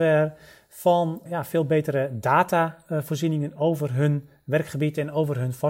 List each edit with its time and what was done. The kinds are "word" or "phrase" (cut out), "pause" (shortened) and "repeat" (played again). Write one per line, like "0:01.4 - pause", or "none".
0:01.3 - word